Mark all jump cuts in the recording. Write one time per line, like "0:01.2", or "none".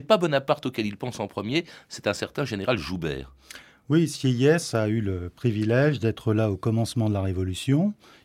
none